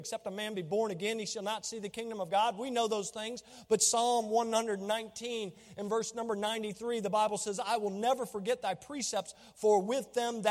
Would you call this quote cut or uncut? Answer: uncut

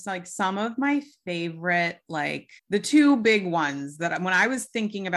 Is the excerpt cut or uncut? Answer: cut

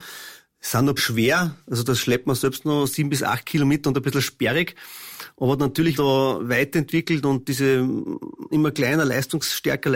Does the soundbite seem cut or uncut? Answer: cut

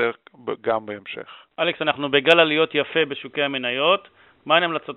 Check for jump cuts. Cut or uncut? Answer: cut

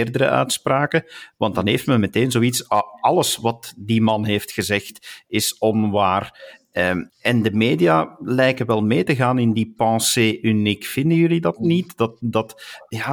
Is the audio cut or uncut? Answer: cut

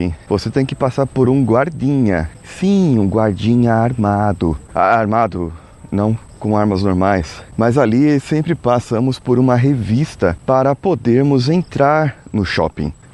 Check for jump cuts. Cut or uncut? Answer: uncut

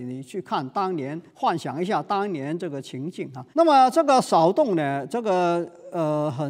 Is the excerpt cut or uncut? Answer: cut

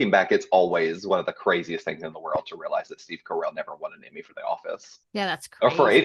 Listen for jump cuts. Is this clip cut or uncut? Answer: cut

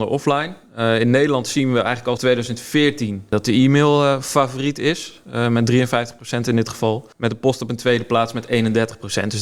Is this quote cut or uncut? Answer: cut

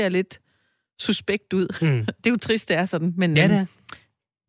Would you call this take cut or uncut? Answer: uncut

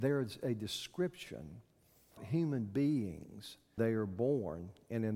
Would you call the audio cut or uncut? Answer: cut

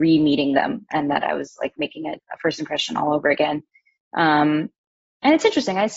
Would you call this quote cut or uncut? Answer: uncut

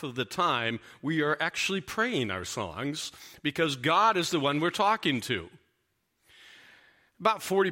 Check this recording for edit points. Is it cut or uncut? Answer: uncut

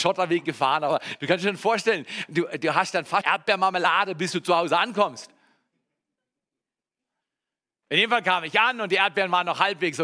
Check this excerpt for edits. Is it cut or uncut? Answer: cut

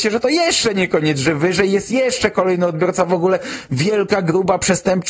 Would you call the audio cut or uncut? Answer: uncut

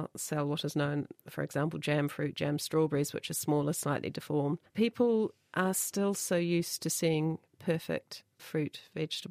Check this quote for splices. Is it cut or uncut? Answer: cut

